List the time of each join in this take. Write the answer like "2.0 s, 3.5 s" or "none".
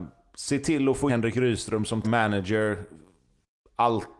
1.1 s, 2.0 s